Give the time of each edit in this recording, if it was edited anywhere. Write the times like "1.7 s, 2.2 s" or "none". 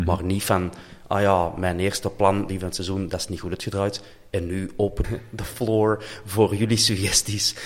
2.5 s, 5.0 s